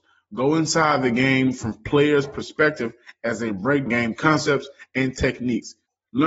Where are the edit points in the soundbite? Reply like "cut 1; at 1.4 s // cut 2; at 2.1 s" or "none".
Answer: cut 1; at 3.9 s